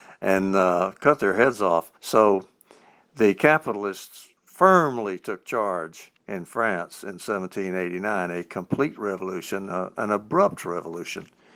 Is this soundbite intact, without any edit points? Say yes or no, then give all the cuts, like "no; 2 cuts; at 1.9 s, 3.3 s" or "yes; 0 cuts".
no; 3 cuts; at 2.0 s, 4.4 s, 6.2 s